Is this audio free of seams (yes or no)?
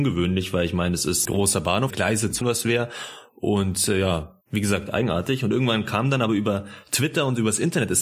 no